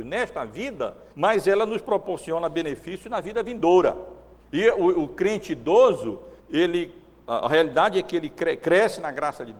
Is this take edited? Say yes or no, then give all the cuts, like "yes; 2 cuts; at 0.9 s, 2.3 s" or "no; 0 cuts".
yes; 3 cuts; at 1.1 s, 4.4 s, 6.4 s